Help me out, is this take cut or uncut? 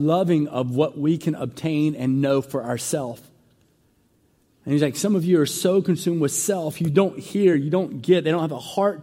uncut